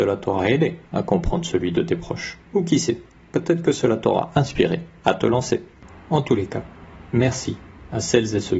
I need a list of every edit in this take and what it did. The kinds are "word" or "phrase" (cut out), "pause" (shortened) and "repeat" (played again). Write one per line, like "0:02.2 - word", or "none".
0:02.4 - pause